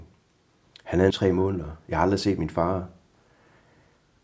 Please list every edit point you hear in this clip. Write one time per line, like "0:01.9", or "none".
0:01.1

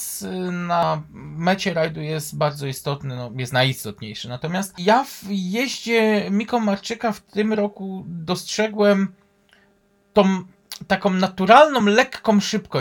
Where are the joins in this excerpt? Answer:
none

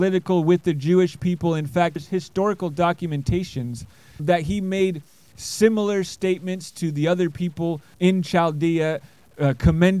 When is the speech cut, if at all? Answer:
0:02.0
0:04.2
0:07.9

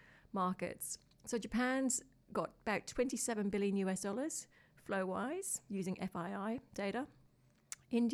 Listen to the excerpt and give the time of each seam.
none

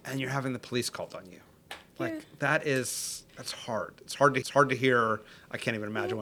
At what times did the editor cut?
0:03.3
0:04.4

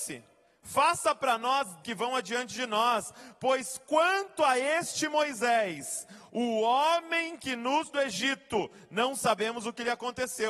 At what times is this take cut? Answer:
0:01.8
0:07.9

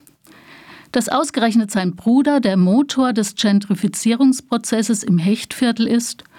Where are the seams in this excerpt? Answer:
none

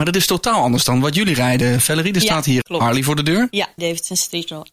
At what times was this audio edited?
0:02.6
0:03.8

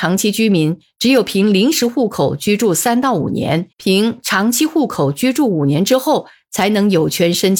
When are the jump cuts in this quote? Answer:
0:03.7

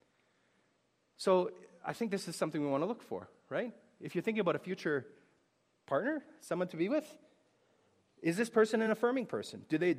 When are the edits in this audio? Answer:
none

